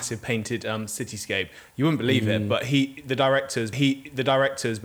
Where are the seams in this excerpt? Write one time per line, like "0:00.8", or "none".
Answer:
0:03.7